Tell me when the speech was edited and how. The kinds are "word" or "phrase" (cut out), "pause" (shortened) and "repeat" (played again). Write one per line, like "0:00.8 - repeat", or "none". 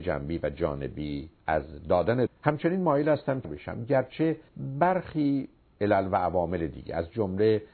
0:01.4 - pause
0:02.3 - phrase
0:03.4 - word
0:04.5 - pause